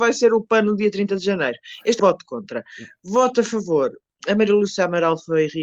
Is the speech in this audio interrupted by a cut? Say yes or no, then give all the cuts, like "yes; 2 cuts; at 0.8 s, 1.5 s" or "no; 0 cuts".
yes; 2 cuts; at 2.0 s, 4.2 s